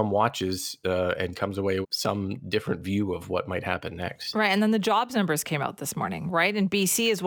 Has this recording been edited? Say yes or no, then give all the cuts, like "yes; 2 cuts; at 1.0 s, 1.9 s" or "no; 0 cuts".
yes; 1 cut; at 1.8 s